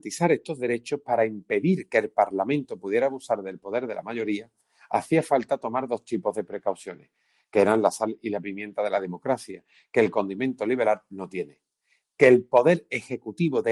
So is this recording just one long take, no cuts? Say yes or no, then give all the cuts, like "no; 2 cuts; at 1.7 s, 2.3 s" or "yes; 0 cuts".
yes; 0 cuts